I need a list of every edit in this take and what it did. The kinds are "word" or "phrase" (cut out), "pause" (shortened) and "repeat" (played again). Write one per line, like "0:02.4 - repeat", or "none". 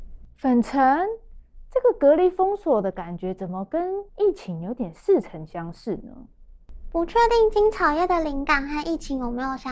0:04.1 - pause